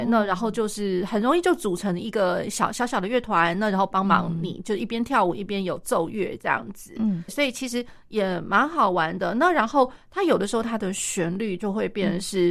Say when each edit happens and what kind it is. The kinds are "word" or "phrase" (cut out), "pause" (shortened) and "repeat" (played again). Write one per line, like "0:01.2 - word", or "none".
0:07.3 - word

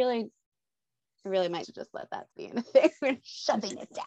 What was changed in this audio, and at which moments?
0:01.6 - word
0:02.3 - word

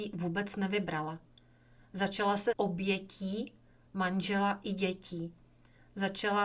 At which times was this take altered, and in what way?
0:02.5 - word

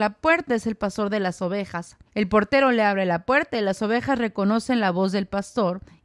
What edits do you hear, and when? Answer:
0:02.1 - pause

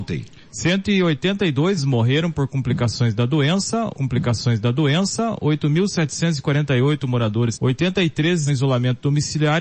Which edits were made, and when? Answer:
0:01.8 - word
0:03.9 - repeat
0:07.5 - phrase
0:08.5 - word

